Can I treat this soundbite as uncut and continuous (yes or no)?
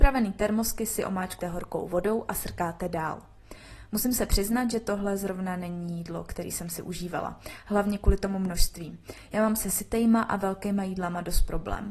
no